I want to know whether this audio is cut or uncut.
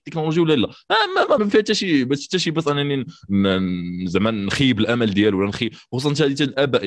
cut